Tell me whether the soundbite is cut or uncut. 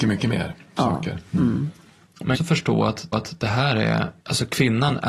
cut